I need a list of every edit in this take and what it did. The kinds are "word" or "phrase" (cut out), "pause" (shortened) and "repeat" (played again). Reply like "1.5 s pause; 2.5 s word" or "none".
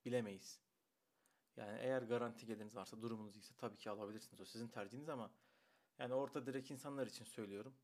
none

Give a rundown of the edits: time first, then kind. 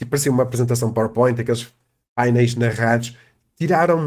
none

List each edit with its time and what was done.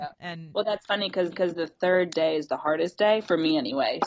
1.3 s repeat

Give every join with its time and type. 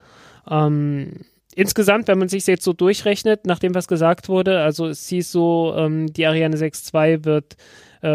1.4 s pause

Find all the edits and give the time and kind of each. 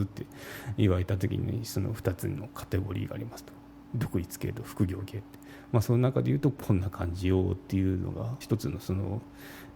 8.4 s phrase

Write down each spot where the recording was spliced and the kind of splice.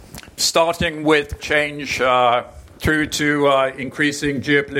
1.4 s word

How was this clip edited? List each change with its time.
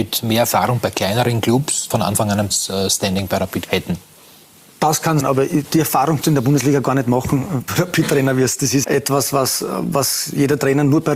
1.9 s word; 2.5 s word; 3.7 s word; 5.2 s word; 5.6 s word; 6.2 s word; 7.7 s word; 8.8 s word

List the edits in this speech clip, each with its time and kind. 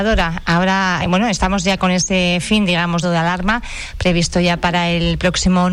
1.0 s word; 3.0 s phrase

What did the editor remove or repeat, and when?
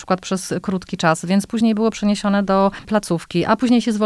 none

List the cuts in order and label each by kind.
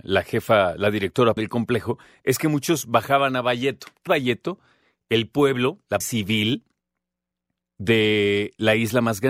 1.4 s word; 4.1 s word; 6.0 s word

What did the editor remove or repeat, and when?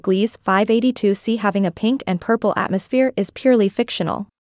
none

